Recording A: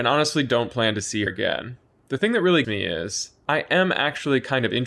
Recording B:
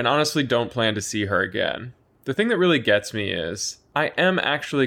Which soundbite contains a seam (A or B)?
A